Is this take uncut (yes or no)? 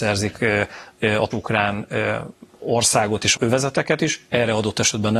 no